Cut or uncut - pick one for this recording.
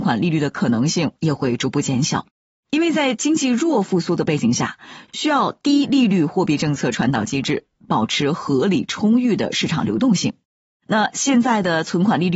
uncut